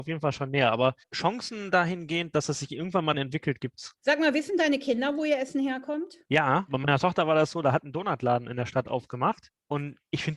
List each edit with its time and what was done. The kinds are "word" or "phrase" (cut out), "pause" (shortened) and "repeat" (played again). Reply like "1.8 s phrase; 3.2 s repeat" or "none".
3.1 s word; 4.0 s pause